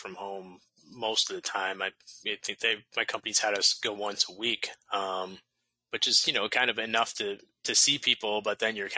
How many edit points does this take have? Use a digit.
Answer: 2